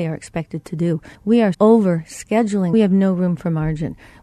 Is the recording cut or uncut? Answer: cut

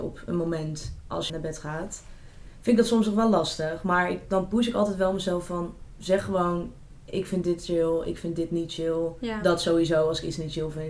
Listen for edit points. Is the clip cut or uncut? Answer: cut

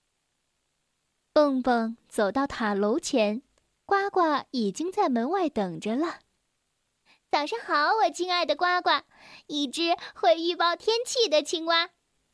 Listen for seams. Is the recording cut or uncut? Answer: uncut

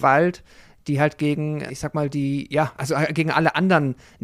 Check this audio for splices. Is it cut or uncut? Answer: cut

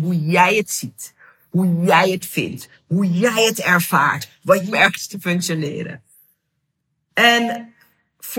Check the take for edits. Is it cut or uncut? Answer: cut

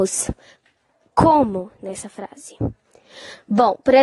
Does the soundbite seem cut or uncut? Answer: uncut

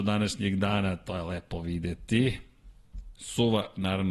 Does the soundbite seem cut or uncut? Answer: uncut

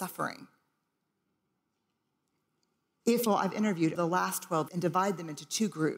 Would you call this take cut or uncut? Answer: cut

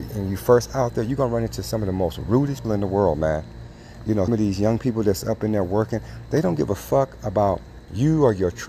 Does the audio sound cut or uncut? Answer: cut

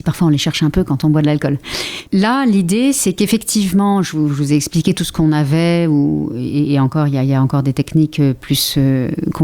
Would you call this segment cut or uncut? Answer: uncut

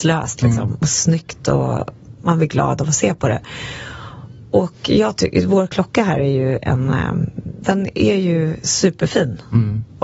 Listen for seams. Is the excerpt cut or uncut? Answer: uncut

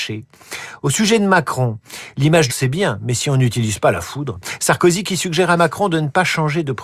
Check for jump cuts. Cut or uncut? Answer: cut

